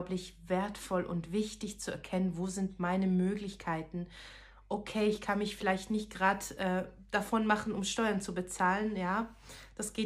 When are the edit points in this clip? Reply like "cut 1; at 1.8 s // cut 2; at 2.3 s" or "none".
none